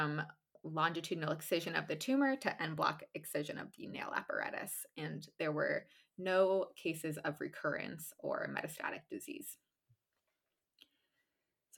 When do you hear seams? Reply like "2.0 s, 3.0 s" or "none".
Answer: none